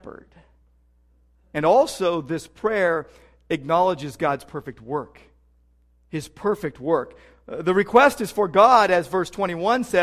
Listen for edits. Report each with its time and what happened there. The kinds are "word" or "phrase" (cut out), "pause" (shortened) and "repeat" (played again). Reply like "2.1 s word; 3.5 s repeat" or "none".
none

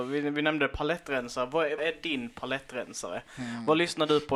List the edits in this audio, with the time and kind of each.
1.8 s word

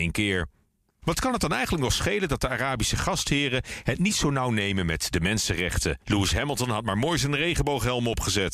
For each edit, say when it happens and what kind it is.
6.0 s pause

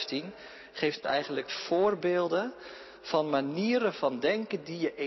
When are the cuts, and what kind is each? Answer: 1.0 s word; 1.5 s word

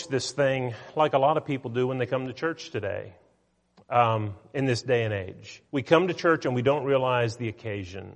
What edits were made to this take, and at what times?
5.7 s pause

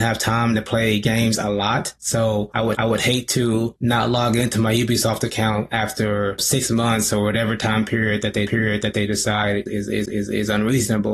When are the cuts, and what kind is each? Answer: 2.0 s pause; 2.7 s repeat; 8.5 s repeat; 10.0 s repeat

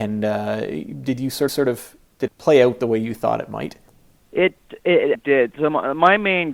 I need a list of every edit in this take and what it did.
1.5 s repeat; 2.3 s word; 3.9 s pause; 5.1 s word

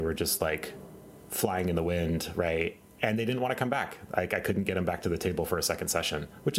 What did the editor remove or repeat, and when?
none

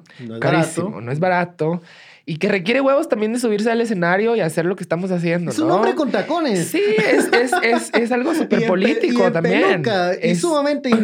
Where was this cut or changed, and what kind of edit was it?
none

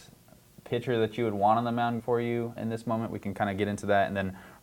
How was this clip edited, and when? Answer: 2.0 s word; 2.6 s word

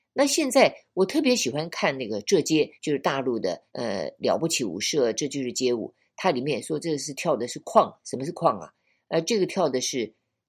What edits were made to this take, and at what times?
2.7 s pause; 3.7 s pause

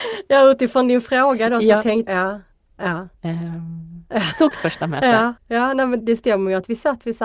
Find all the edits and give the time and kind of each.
2.1 s word; 3.1 s pause; 4.5 s phrase; 5.4 s pause; 6.0 s word

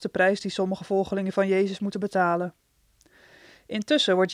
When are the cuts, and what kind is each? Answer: none

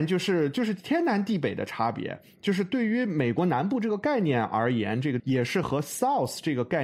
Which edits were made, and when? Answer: 5.2 s phrase

